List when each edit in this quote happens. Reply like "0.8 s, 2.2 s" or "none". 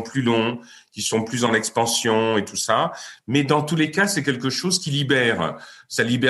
none